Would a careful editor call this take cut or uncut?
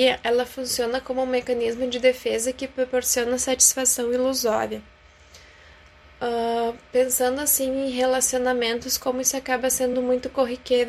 uncut